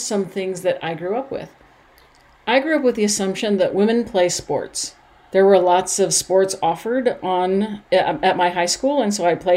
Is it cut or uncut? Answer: uncut